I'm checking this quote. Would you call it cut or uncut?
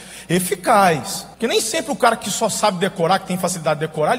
cut